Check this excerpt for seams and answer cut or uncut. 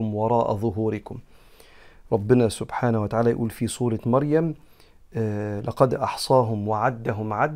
uncut